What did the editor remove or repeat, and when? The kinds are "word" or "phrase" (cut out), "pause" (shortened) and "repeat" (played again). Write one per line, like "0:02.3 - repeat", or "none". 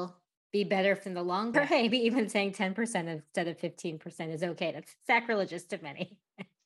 0:01.0 - phrase
0:01.5 - phrase
0:01.9 - word